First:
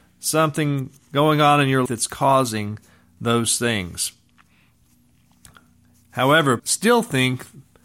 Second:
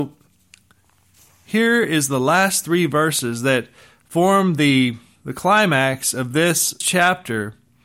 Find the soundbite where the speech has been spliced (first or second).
first